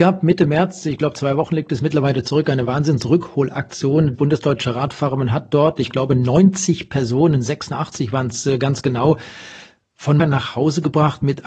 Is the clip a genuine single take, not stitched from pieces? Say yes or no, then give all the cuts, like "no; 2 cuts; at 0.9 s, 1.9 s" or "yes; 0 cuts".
no; 2 cuts; at 4.1 s, 10.2 s